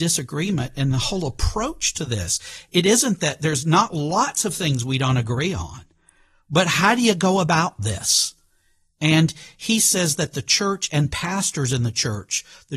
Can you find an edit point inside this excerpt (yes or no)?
no